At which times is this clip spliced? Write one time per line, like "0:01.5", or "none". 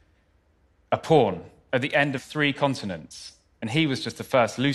0:02.2